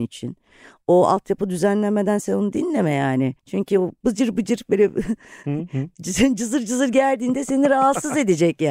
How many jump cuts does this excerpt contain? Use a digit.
1